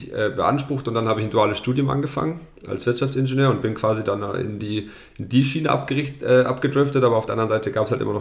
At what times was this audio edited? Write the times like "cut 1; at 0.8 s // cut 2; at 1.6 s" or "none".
none

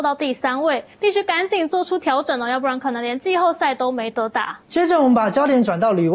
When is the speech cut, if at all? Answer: cut 1; at 0.9 s // cut 2; at 4.6 s

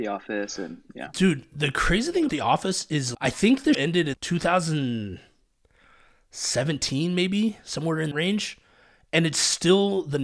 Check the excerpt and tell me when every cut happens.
cut 1; at 2.3 s // cut 2; at 3.1 s // cut 3; at 3.7 s // cut 4; at 4.1 s // cut 5; at 8.1 s

